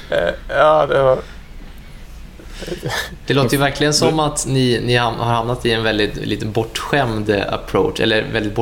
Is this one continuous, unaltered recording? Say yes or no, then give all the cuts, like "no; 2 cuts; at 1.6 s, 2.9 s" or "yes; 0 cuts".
yes; 0 cuts